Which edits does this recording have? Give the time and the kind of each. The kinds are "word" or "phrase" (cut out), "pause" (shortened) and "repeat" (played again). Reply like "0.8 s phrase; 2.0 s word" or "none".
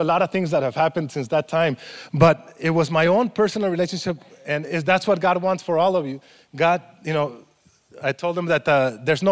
none